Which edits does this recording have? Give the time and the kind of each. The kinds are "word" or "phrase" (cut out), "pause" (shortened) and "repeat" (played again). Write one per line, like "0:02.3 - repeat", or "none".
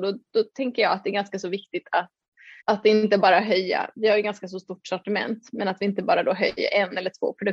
0:02.6 - pause